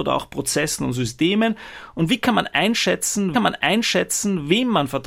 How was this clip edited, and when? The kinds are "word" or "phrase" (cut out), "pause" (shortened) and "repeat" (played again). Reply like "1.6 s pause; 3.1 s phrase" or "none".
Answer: 3.3 s repeat